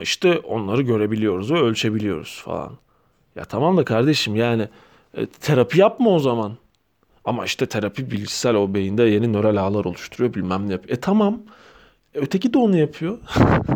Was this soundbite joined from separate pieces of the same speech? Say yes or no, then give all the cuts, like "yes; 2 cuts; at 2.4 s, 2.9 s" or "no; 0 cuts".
no; 0 cuts